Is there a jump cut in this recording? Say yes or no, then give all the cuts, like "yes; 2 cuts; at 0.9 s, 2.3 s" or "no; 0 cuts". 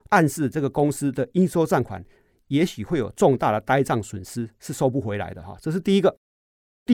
no; 0 cuts